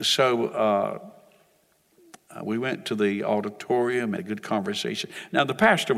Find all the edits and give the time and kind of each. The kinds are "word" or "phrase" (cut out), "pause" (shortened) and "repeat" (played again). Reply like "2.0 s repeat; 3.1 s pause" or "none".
4.2 s phrase